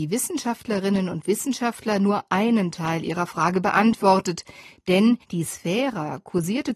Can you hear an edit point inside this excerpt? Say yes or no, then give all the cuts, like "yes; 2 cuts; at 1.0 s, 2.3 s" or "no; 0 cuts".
yes; 1 cut; at 5.2 s